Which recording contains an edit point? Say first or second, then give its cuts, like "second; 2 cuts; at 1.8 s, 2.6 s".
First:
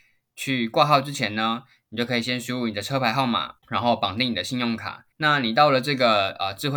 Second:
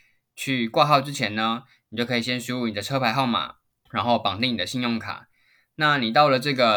first; 2 cuts; at 3.6 s, 5.1 s